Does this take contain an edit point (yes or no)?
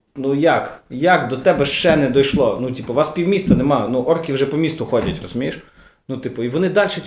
no